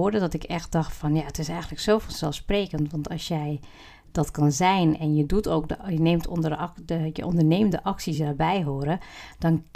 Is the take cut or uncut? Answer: uncut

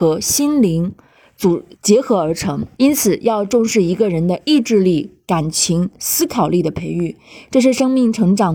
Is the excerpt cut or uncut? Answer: cut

